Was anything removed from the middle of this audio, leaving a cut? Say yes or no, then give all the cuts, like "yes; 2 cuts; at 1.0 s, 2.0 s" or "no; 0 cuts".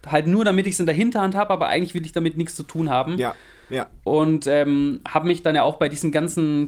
no; 0 cuts